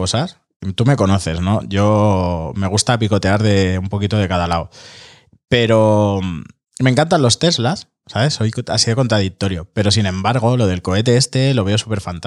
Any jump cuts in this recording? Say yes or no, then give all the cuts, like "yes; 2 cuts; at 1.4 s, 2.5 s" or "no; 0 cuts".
no; 0 cuts